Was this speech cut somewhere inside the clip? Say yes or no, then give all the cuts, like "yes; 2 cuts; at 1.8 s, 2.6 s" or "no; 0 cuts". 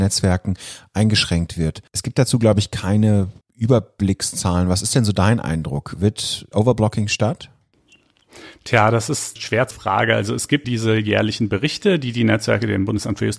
yes; 6 cuts; at 1.9 s, 3.4 s, 6.5 s, 9.4 s, 9.7 s, 10.6 s